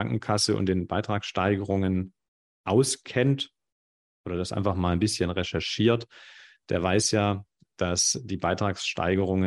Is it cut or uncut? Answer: uncut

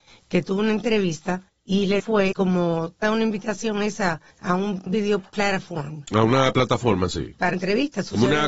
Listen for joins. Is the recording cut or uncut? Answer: cut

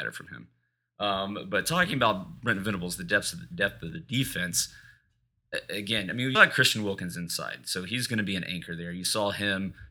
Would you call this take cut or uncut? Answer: cut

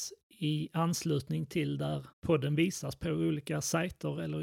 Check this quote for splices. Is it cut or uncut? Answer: cut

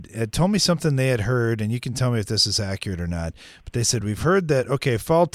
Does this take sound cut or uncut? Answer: uncut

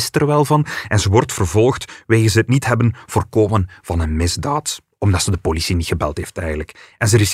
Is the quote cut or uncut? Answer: uncut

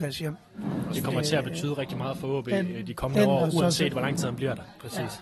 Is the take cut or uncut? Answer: uncut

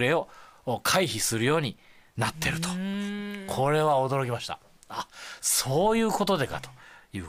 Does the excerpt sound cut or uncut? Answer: uncut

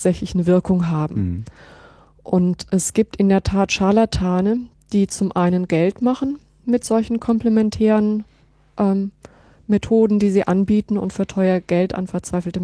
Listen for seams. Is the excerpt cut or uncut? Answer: uncut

